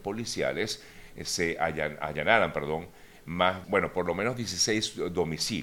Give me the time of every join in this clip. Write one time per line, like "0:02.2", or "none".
0:03.6

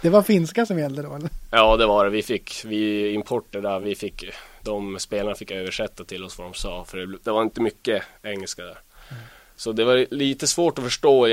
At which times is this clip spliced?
none

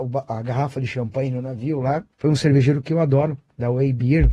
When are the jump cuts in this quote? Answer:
0:02.1

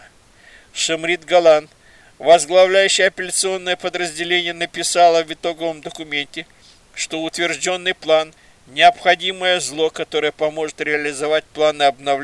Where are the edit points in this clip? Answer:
0:08.4

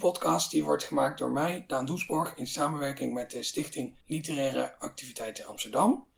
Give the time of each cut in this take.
0:04.0

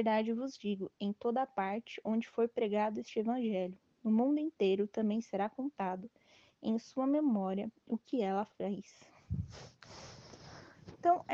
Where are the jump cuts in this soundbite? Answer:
none

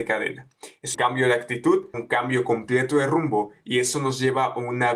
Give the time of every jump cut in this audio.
0:00.9
0:01.9

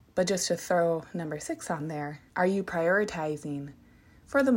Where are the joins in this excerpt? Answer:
0:02.3

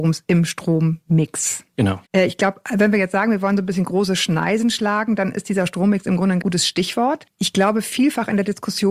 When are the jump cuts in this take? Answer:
0:02.0
0:06.4

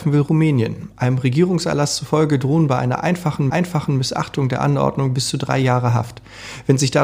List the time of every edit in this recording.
0:03.5

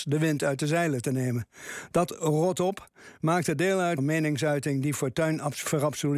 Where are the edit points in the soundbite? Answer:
0:04.0

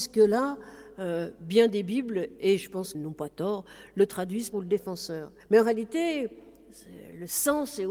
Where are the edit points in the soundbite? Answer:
0:02.9
0:04.5
0:05.4

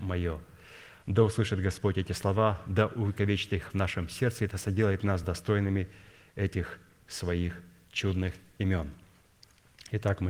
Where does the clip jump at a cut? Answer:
none

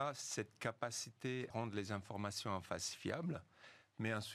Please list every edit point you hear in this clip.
0:01.5

